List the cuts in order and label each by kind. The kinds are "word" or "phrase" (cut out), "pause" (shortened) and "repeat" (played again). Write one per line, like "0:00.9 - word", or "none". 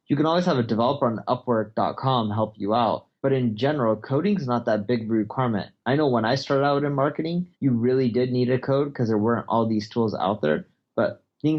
0:03.2 - pause
0:07.5 - pause